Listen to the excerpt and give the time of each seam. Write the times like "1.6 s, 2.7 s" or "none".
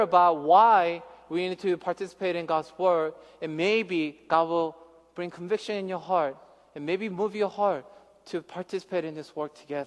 none